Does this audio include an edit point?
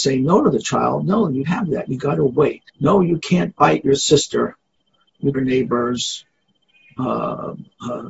yes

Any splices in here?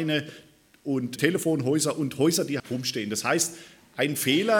yes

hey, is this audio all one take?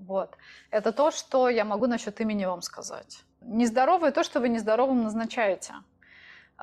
yes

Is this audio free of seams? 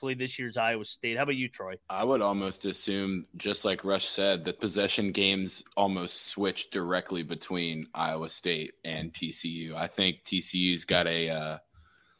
no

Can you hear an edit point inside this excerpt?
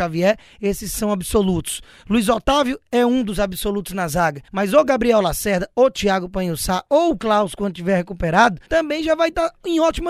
yes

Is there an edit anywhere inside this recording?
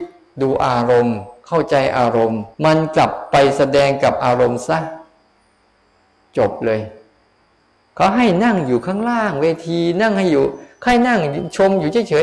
yes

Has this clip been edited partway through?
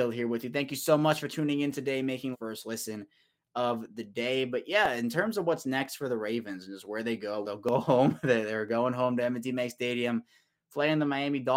yes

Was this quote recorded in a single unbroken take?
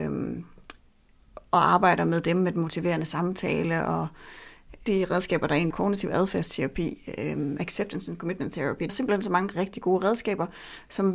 no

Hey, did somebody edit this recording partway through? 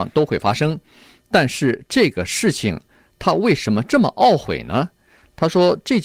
no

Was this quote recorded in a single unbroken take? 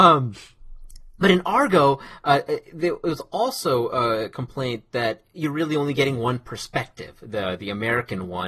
yes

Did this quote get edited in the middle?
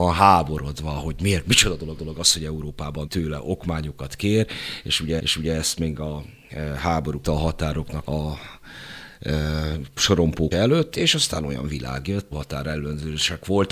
yes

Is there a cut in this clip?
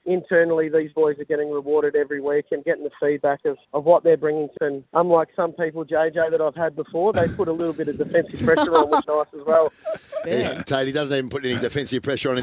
yes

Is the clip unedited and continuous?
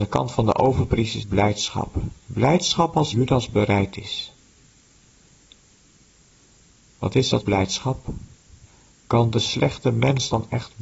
no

